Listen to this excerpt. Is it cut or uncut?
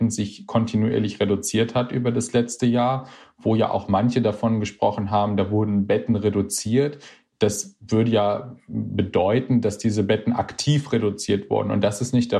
uncut